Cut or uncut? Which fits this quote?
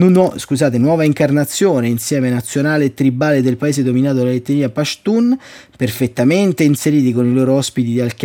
uncut